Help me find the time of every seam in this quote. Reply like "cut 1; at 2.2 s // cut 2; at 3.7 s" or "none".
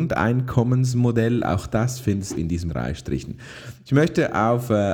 cut 1; at 2.3 s // cut 2; at 2.7 s

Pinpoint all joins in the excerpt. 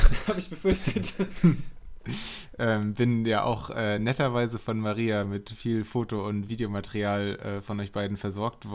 none

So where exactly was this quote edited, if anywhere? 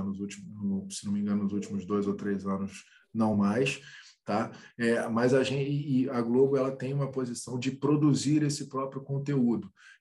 none

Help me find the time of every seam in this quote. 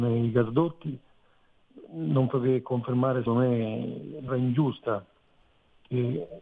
cut 1; at 2.3 s // cut 2; at 3.3 s // cut 3; at 4.3 s

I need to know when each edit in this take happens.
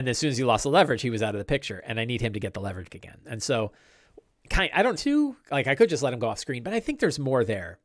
cut 1; at 2.9 s // cut 2; at 5.0 s

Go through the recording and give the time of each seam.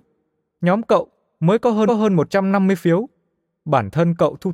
cut 1; at 1.9 s

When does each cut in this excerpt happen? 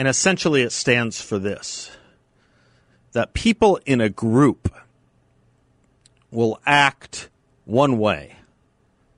none

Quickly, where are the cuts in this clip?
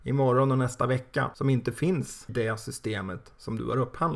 cut 1; at 2.3 s

